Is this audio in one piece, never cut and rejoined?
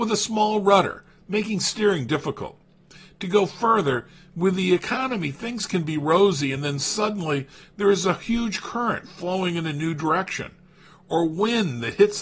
yes; 0 cuts

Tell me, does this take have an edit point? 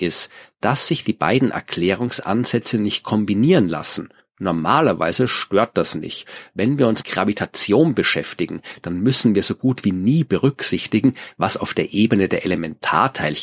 yes; 2 cuts; at 4.2 s, 7.0 s

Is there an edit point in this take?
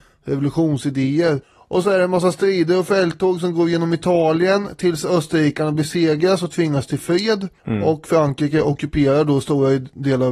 yes; 2 cuts; at 1.4 s, 7.6 s

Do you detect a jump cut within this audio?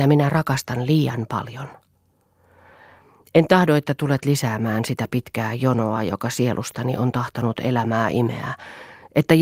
no; 0 cuts

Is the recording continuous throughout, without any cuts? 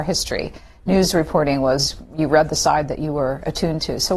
yes; 0 cuts

